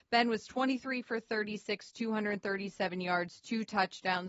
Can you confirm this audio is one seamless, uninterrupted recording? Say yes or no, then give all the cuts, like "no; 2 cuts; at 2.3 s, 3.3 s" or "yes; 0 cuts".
yes; 0 cuts